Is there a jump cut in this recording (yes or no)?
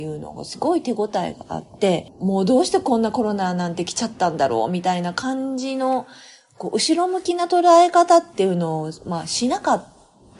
no